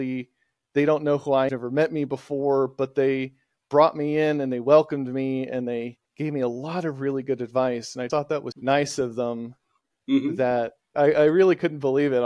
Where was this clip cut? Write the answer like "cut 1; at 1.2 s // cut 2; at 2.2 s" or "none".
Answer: cut 1; at 1.5 s // cut 2; at 6.0 s // cut 3; at 8.1 s // cut 4; at 8.5 s // cut 5; at 10.9 s